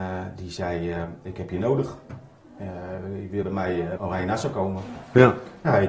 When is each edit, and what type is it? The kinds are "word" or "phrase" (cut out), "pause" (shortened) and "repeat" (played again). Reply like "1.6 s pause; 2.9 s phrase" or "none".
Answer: 3.4 s word; 4.0 s word